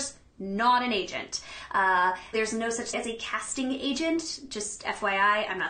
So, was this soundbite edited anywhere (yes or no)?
yes